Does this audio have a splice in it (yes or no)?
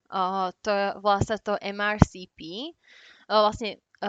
no